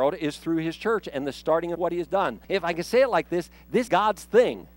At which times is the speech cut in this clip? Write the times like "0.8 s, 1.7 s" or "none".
1.7 s, 2.4 s, 3.9 s